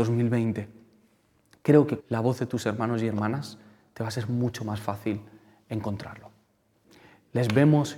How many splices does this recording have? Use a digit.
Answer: 1